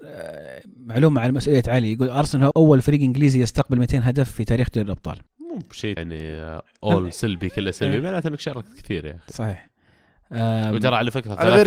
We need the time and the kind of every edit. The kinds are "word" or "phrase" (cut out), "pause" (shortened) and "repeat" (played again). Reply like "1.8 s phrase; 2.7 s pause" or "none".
2.5 s word; 5.3 s pause; 6.0 s word